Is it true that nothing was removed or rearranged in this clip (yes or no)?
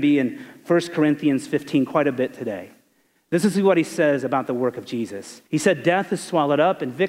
no